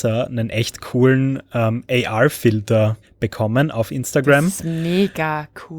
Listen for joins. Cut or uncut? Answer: cut